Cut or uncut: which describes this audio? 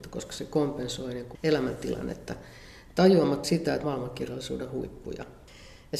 cut